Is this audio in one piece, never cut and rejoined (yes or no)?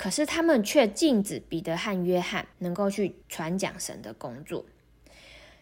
no